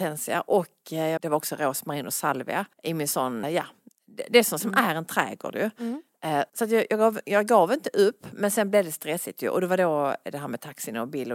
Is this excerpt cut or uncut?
cut